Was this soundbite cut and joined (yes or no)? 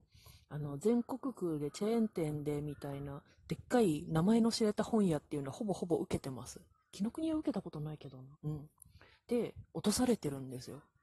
yes